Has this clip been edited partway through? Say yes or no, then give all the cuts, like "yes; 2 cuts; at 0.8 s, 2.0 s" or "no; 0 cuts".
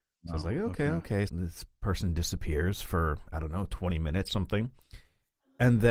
yes; 2 cuts; at 1.3 s, 4.3 s